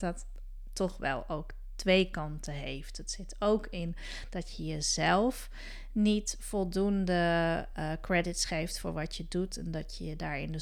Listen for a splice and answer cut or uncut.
uncut